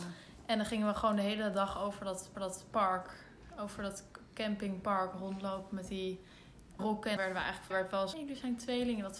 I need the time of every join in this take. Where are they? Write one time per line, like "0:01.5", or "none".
0:02.3
0:06.8
0:07.2
0:07.7
0:08.1